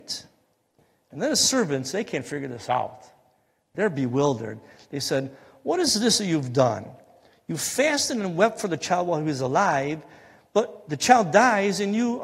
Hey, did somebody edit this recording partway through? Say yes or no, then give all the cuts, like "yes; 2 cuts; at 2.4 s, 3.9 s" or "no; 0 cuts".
no; 0 cuts